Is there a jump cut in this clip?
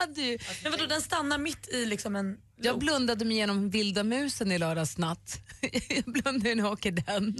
no; 0 cuts

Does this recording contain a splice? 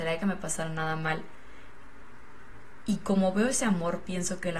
no; 0 cuts

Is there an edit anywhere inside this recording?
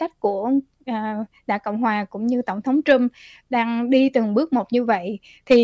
no; 0 cuts

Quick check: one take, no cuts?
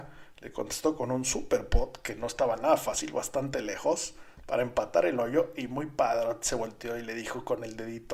yes; 0 cuts

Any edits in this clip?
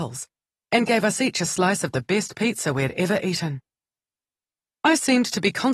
no; 0 cuts

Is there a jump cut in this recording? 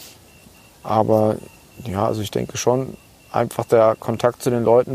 no; 0 cuts

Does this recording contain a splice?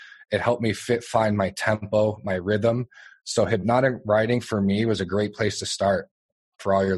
no; 0 cuts

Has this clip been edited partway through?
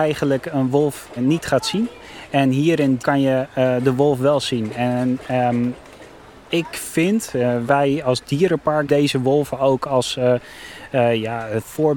yes; 4 cuts; at 1.2 s, 3.0 s, 7.7 s, 8.9 s

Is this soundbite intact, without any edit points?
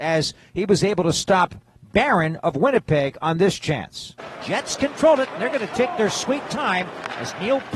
yes; 0 cuts

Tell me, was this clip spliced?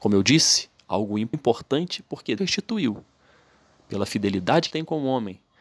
yes; 3 cuts; at 1.3 s, 2.4 s, 4.7 s

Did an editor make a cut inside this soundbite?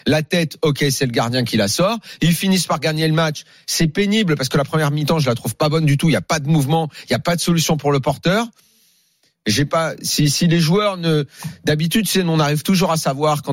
no; 0 cuts

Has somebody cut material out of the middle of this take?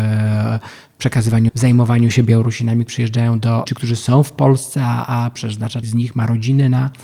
yes; 5 cuts; at 1.5 s, 2.9 s, 3.7 s, 5.3 s, 5.8 s

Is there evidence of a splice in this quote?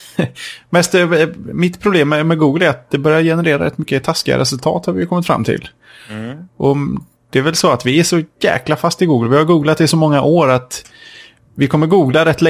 no; 0 cuts

